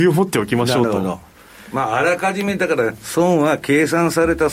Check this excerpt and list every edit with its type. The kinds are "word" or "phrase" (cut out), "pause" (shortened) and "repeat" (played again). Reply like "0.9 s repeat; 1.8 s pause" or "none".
none